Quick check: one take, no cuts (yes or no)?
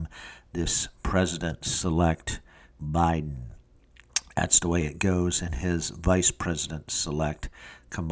no